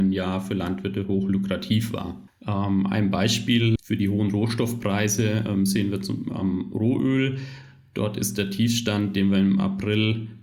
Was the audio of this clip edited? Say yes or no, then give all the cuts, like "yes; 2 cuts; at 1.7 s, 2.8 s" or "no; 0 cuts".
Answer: no; 0 cuts